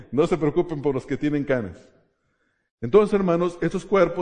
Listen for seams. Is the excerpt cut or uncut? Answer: uncut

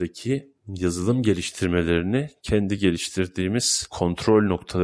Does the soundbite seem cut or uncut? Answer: uncut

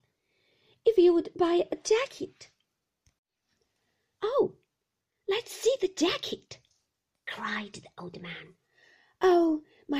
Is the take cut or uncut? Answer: uncut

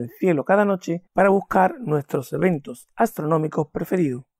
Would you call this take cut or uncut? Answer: cut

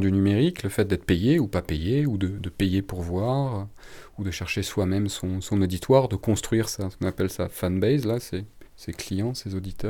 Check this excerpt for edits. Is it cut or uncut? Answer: cut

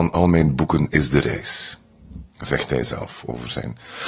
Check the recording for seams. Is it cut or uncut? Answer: cut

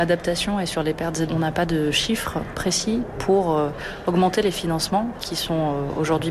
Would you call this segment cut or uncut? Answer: cut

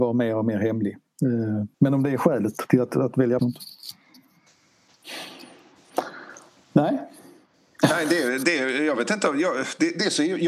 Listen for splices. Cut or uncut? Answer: cut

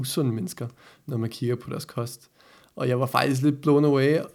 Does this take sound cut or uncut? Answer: uncut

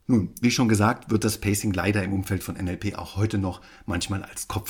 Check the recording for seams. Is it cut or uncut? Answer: uncut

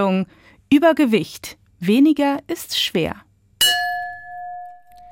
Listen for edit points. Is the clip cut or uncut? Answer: uncut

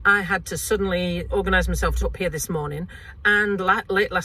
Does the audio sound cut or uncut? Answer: cut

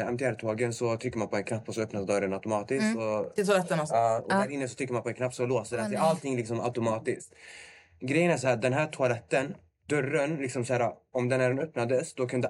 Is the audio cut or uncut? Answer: uncut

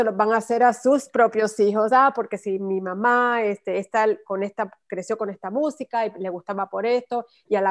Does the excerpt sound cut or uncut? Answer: uncut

